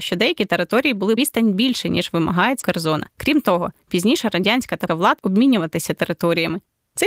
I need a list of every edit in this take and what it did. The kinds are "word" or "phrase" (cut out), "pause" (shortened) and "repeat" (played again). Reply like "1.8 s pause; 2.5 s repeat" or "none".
1.2 s phrase; 2.6 s phrase; 3.1 s pause; 4.9 s word; 5.2 s word